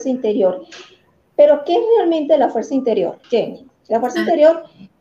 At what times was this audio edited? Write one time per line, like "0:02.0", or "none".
0:03.2